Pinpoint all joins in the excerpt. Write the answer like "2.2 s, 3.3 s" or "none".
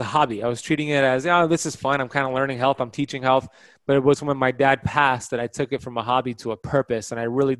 none